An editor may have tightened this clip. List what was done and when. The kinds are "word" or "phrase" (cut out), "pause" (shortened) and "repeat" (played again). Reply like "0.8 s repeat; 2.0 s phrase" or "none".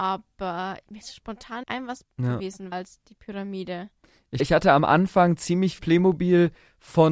1.0 s word; 1.6 s word; 2.0 s word; 2.7 s word; 4.4 s word; 5.8 s word

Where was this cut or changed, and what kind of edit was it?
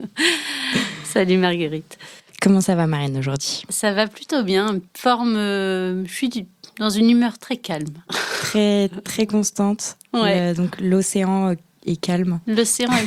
4.9 s pause

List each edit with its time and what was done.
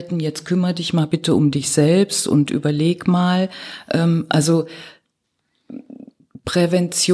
none

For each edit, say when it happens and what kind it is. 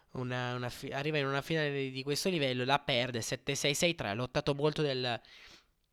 none

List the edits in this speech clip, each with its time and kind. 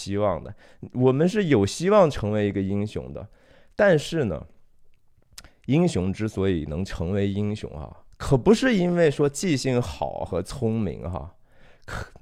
8.1 s pause

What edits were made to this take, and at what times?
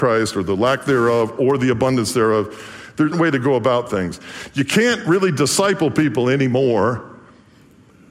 3.1 s phrase

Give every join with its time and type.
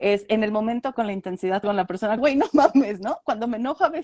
0.9 s word; 1.6 s word; 2.2 s word

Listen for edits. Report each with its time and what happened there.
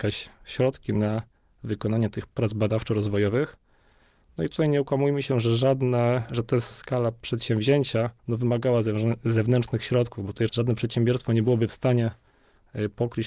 2.3 s word; 6.7 s word; 8.2 s pause; 10.5 s word

